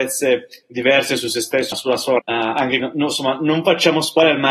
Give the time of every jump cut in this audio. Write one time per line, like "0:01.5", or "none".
0:01.7
0:02.2
0:02.8